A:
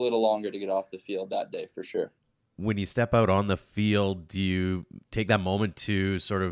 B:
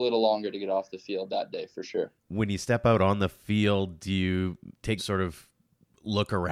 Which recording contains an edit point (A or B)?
B